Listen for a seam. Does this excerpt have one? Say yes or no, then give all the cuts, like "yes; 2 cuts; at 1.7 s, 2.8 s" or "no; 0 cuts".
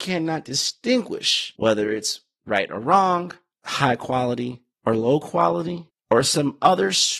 no; 0 cuts